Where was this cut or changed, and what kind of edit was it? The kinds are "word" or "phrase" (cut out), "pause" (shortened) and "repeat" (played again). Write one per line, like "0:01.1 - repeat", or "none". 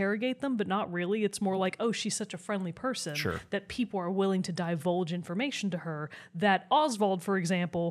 none

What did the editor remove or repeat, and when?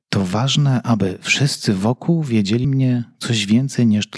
0:02.6 - phrase

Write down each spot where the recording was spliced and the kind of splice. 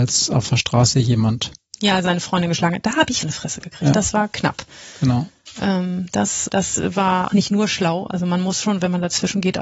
0:03.2 - phrase
0:06.5 - word
0:07.3 - word

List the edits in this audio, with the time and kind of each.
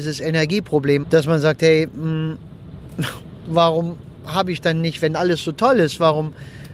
0:01.0 - word

